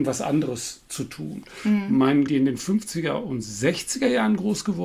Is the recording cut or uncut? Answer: cut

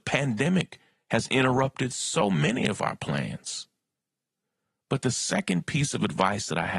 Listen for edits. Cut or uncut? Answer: uncut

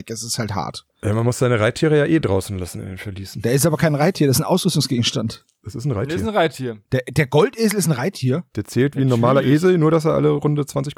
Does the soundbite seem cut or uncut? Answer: cut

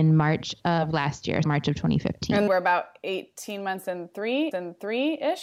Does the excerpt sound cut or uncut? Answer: cut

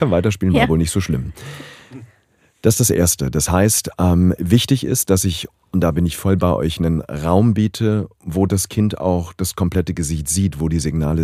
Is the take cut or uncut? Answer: uncut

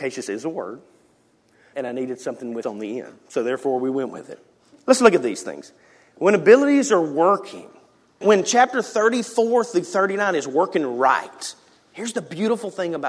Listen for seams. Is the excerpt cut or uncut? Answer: cut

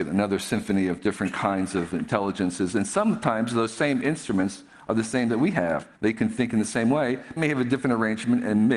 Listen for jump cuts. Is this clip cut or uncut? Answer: cut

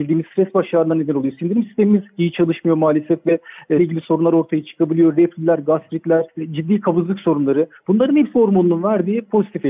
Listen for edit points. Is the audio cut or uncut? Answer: cut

